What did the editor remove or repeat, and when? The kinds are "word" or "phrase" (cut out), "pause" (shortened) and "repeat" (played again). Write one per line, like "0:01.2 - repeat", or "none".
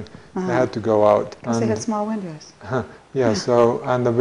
0:01.4 - pause

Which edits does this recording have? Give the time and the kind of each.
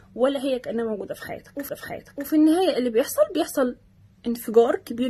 0:01.7 - repeat

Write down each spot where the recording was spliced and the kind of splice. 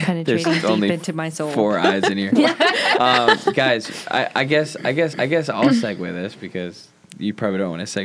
0:05.1 - repeat

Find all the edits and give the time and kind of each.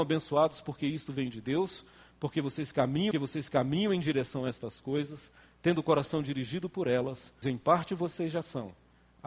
0:03.1 - repeat
0:07.4 - word

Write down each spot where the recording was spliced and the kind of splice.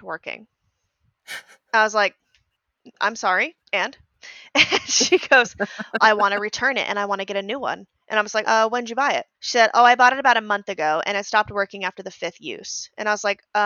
0:03.6 - pause
0:06.0 - word
0:08.4 - word
0:09.3 - pause

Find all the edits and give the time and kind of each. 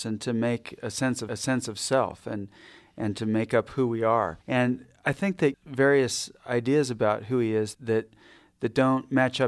0:01.3 - repeat
0:04.4 - pause
0:05.5 - phrase
0:07.7 - word

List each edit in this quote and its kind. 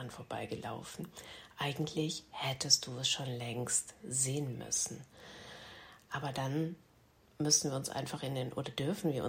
none

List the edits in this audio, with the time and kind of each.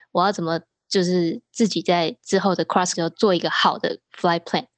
0:02.9 - word

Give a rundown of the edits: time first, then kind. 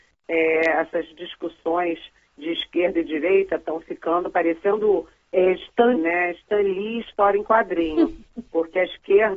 0:06.0 - word

